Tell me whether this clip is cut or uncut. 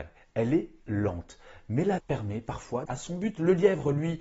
cut